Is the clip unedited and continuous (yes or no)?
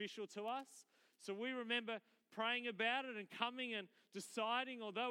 yes